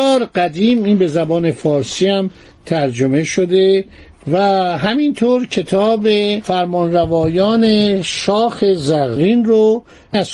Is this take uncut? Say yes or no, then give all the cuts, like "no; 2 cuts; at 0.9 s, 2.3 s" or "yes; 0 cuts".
yes; 0 cuts